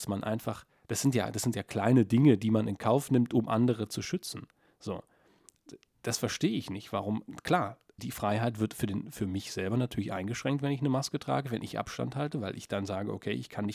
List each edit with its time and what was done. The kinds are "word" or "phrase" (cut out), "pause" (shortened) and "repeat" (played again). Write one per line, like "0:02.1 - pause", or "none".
0:08.0 - word